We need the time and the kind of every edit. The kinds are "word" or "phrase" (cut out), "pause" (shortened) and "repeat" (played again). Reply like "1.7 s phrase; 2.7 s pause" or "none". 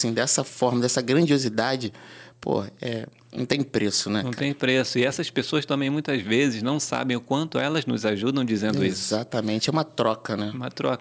none